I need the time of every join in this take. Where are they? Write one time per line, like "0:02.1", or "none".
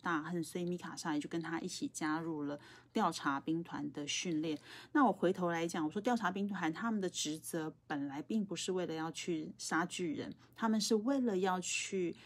0:10.4

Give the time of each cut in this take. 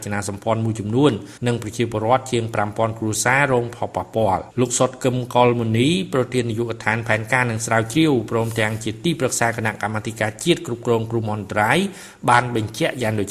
0:01.4
0:04.5

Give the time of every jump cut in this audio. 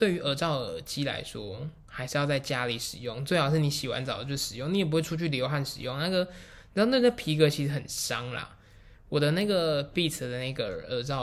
none

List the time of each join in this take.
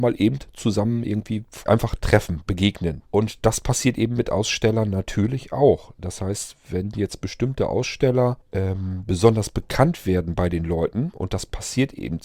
0:01.7
0:03.1
0:08.4

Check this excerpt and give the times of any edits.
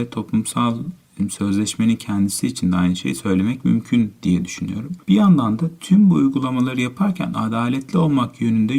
0:05.0

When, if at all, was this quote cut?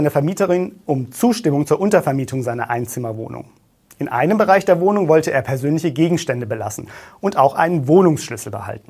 none

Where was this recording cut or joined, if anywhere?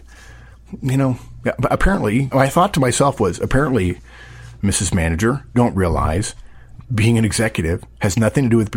0:02.3
0:05.5
0:06.8

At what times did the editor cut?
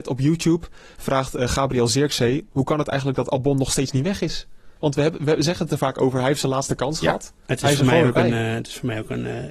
0:04.8

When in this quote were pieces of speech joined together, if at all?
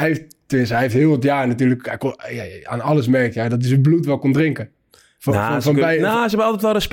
none

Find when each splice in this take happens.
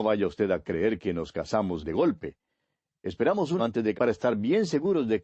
0:01.8
0:03.6
0:04.0

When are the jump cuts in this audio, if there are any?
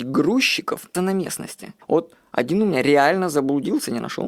0:00.9
0:01.8

